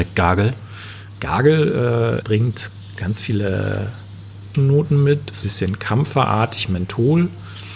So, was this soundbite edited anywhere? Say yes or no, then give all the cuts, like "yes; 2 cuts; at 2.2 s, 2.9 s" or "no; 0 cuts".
yes; 3 cuts; at 2.2 s, 4.5 s, 5.4 s